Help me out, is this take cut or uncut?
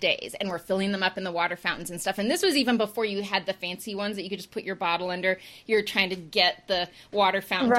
uncut